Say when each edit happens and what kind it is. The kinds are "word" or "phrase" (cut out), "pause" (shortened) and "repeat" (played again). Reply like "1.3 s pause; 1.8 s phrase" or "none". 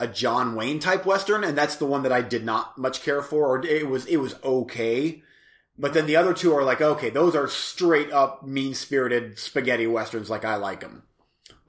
none